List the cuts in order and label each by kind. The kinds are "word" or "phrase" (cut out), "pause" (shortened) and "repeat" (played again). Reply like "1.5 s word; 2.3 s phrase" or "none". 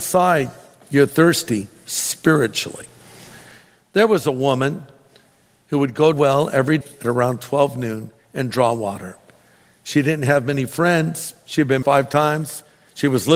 6.1 s phrase; 6.8 s word; 11.8 s phrase